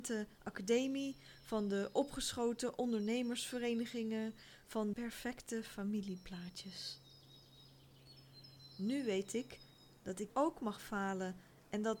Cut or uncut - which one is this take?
cut